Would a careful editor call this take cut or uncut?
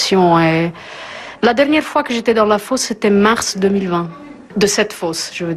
uncut